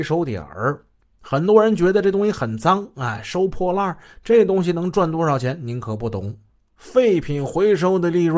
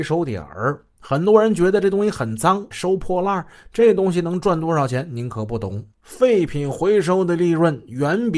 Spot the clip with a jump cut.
second; 3 cuts; at 0.9 s, 2.7 s, 5.9 s

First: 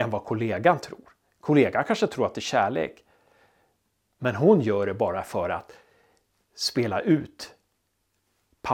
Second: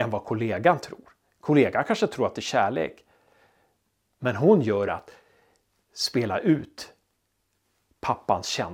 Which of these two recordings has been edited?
second; 1 cut; at 4.9 s

